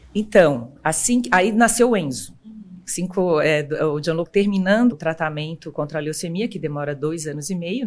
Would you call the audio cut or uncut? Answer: cut